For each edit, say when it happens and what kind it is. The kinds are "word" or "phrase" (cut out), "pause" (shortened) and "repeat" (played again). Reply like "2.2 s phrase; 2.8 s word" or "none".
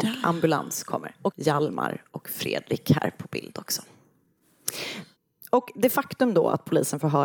1.3 s phrase

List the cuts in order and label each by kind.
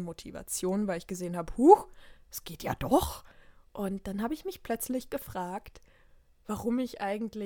none

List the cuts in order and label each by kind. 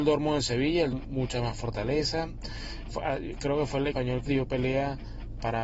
0.9 s word; 2.9 s word; 3.9 s word; 4.3 s word

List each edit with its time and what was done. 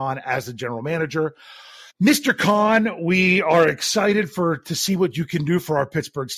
1.9 s pause

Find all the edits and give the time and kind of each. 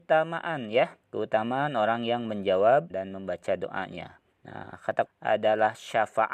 1.0 s pause; 2.9 s word; 4.3 s pause; 5.1 s word

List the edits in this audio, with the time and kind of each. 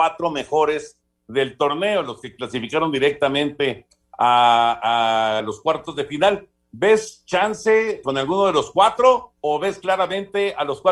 5.4 s phrase; 8.0 s word; 9.4 s pause

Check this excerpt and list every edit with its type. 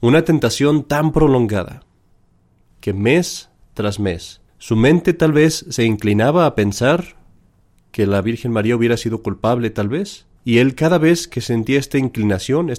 4.5 s pause; 10.4 s pause

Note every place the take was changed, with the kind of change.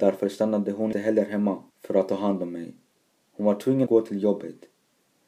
0.9 s word; 1.7 s pause; 3.0 s pause; 3.9 s word

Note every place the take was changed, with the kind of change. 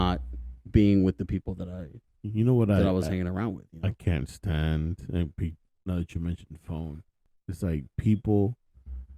none

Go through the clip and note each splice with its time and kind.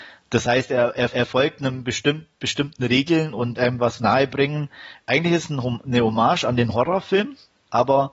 1.1 s repeat; 3.6 s word

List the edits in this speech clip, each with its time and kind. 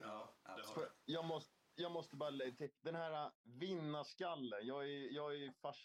2.8 s pause; 3.4 s pause

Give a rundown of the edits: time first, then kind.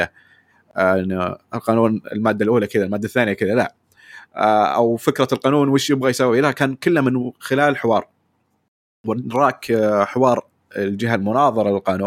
none

